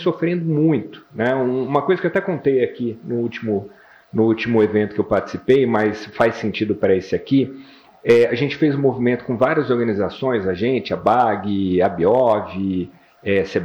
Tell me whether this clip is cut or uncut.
uncut